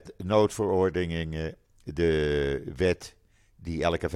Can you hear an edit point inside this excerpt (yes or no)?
no